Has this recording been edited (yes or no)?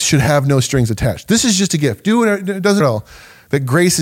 yes